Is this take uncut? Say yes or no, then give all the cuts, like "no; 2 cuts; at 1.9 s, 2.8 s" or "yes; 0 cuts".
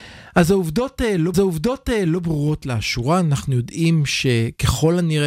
no; 1 cut; at 1.3 s